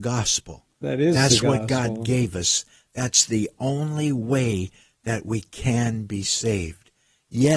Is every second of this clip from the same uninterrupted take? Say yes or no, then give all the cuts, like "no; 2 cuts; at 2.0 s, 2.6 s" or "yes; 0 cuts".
yes; 0 cuts